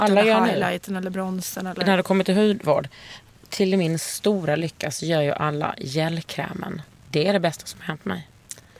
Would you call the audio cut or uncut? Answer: uncut